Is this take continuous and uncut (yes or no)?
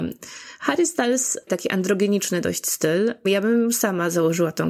no